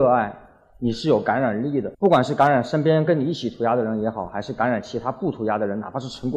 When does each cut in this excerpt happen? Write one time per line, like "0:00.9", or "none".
0:01.9

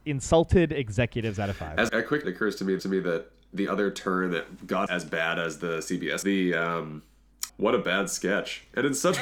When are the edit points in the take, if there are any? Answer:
0:01.9
0:02.2
0:02.8
0:03.7
0:04.9
0:06.2
0:07.5

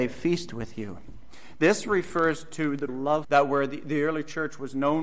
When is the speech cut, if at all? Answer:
0:02.9
0:03.2

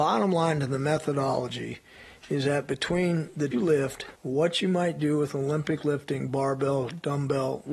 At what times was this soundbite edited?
0:03.5
0:04.2

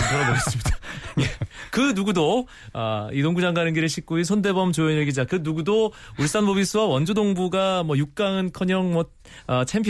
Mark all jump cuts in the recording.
none

